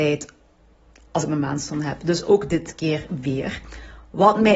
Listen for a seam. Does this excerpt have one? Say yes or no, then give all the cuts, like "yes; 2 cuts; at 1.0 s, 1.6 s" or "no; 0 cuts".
no; 0 cuts